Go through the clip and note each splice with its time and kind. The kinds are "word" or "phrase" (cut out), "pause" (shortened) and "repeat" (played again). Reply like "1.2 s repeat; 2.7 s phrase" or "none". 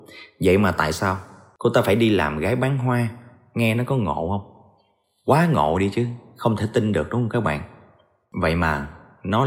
none